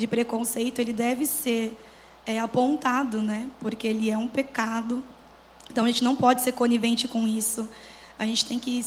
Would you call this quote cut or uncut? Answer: uncut